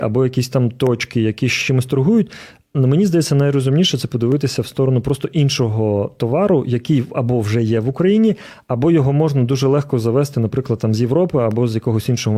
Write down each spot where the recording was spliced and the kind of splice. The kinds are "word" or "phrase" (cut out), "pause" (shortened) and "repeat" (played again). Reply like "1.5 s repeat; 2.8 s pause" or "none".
none